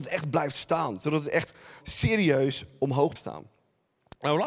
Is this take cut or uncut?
cut